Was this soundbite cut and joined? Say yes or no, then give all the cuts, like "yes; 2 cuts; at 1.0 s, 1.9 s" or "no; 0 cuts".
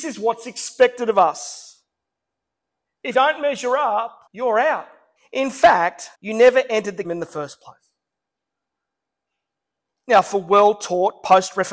yes; 5 cuts; at 3.1 s, 4.3 s, 5.2 s, 6.1 s, 7.0 s